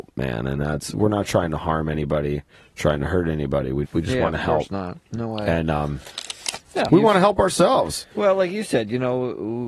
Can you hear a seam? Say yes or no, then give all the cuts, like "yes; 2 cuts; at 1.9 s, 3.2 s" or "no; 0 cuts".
yes; 4 cuts; at 2.5 s, 3.8 s, 6.9 s, 8.1 s